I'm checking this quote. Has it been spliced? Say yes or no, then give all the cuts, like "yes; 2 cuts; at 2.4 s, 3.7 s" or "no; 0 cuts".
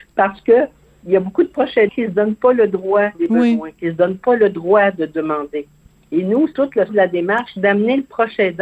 yes; 4 cuts; at 1.9 s, 3.1 s, 6.5 s, 6.9 s